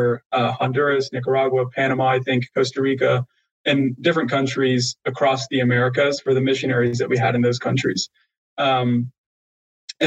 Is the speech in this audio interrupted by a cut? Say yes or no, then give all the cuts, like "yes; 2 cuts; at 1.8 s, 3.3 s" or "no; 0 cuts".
yes; 1 cut; at 5.0 s